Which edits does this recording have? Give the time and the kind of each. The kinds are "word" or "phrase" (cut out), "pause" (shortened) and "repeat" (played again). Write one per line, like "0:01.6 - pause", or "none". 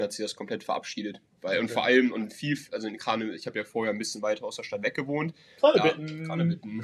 none